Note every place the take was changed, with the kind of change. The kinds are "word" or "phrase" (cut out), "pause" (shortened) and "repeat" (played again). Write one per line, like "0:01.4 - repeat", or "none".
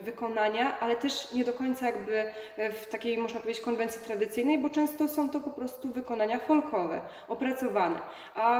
none